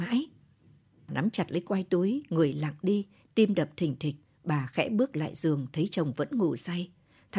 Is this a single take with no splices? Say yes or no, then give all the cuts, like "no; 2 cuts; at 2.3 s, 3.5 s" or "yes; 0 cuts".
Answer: no; 2 cuts; at 1.1 s, 4.2 s